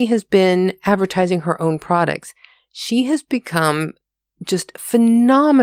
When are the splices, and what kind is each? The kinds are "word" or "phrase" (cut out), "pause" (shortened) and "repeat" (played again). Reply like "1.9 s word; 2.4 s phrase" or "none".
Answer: none